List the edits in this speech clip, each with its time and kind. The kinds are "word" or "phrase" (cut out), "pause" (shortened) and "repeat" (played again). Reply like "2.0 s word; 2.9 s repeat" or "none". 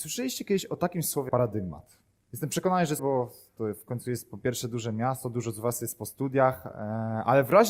1.3 s word; 3.0 s word